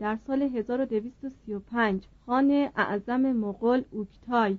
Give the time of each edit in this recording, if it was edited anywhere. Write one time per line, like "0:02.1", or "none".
0:02.1